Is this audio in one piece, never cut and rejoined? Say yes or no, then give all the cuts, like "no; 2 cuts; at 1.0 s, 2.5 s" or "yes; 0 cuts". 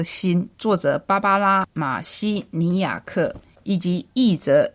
yes; 0 cuts